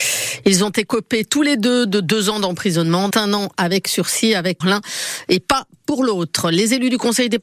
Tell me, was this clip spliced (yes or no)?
yes